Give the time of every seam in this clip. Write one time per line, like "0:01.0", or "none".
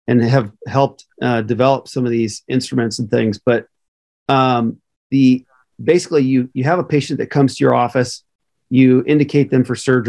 none